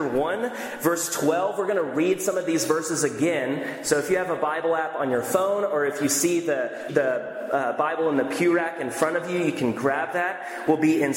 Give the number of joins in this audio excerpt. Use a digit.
1